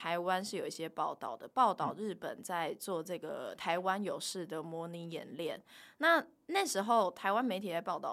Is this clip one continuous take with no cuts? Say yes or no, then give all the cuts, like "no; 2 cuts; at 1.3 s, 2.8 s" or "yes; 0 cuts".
yes; 0 cuts